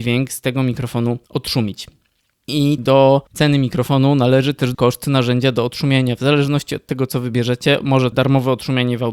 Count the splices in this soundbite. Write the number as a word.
five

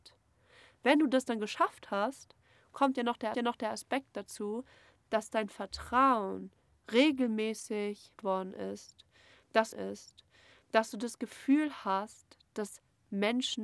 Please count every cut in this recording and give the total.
three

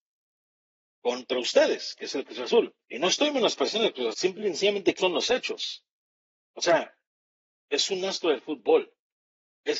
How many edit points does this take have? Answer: three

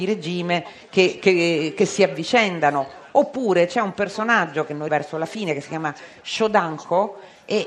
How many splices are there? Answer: one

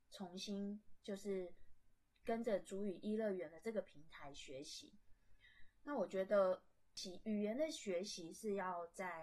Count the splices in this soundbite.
zero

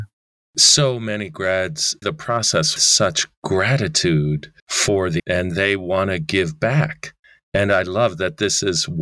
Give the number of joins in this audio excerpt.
four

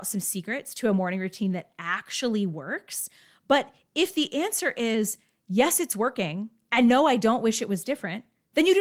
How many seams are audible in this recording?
zero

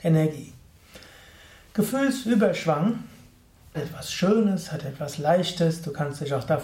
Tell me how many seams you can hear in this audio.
one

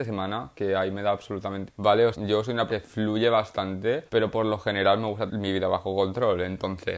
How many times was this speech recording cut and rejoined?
five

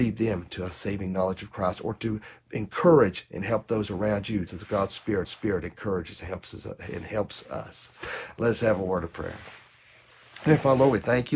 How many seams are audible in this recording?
two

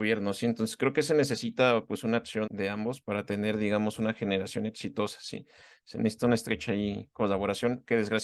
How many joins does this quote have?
two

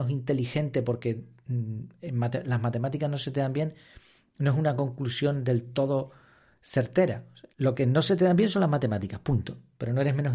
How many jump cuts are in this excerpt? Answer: one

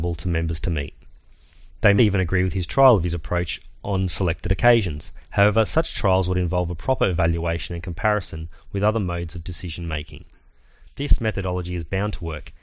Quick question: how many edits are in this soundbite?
one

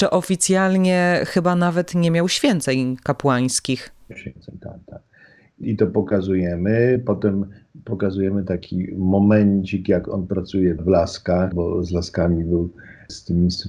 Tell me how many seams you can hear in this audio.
four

